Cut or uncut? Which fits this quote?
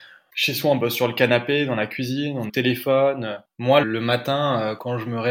cut